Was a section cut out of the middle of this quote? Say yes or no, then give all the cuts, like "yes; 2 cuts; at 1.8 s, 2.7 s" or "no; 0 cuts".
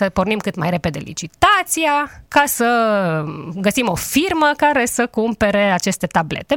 yes; 1 cut; at 2.3 s